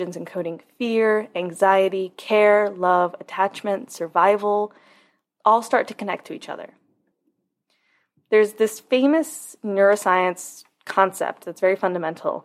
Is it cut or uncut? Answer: uncut